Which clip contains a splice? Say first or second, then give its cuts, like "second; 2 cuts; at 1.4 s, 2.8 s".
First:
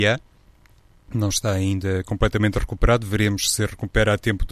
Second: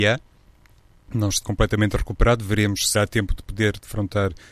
second; 2 cuts; at 1.4 s, 2.9 s